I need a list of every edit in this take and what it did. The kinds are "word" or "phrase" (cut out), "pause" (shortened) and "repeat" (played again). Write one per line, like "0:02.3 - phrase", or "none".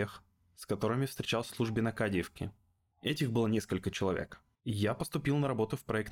0:01.5 - word
0:04.5 - pause

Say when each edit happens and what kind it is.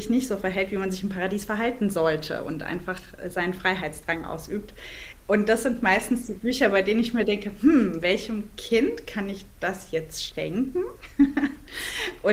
0:05.2 - pause

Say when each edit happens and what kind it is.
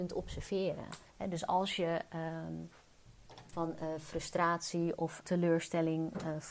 0:01.1 - pause
0:03.5 - word
0:05.2 - word

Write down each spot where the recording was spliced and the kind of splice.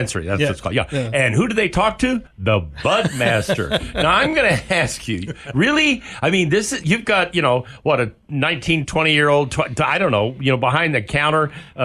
0:02.3 - pause

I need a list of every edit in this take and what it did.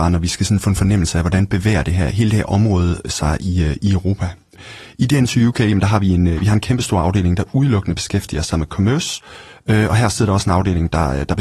none

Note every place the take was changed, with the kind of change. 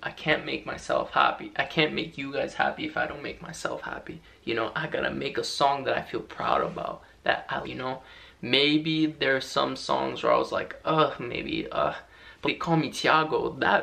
0:07.6 - word
0:12.4 - word

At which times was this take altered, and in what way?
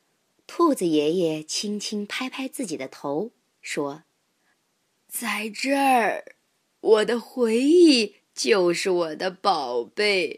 0:08.2 - pause

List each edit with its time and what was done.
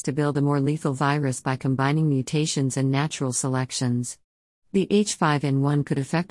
none

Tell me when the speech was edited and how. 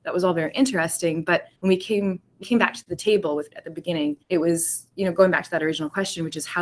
0:01.5 - pause
0:02.4 - word
0:03.5 - word
0:04.2 - pause

